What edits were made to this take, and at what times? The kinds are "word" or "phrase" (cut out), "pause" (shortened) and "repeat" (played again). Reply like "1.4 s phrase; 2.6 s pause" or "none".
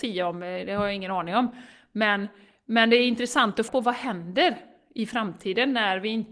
3.7 s word